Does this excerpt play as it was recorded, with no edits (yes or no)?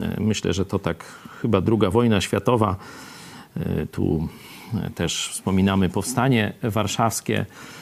no